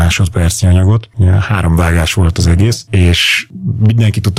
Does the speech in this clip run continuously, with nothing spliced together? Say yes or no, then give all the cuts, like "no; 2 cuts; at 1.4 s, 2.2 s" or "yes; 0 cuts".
yes; 0 cuts